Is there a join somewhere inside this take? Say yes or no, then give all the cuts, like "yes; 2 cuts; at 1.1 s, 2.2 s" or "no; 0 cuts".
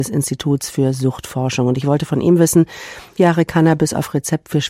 yes; 1 cut; at 3.2 s